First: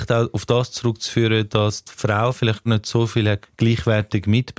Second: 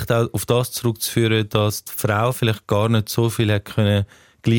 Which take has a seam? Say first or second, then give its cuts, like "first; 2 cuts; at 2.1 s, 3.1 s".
first; 2 cuts; at 2.7 s, 3.4 s